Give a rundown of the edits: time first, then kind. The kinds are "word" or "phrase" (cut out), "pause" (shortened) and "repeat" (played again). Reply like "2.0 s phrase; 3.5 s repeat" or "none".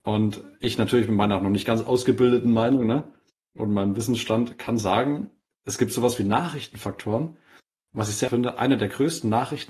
8.3 s word